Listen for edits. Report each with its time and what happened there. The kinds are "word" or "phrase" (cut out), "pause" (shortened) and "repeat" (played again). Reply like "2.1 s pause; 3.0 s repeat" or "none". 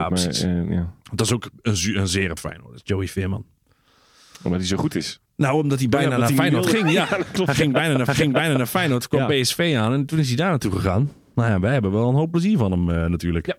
1.0 s pause; 2.4 s phrase; 8.1 s repeat